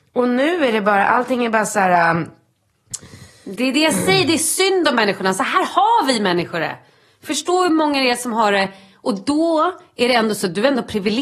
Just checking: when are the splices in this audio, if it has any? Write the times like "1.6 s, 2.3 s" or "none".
none